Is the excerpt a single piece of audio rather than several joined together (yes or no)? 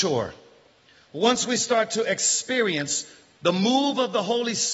yes